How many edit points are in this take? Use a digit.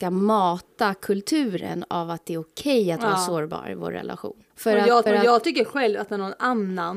2